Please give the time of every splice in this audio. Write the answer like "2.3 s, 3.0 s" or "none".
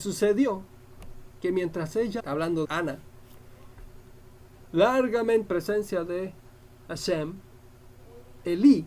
2.2 s, 2.6 s, 5.5 s